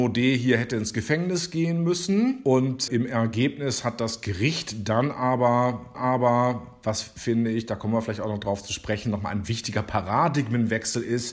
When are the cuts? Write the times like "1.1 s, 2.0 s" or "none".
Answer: 2.9 s, 5.9 s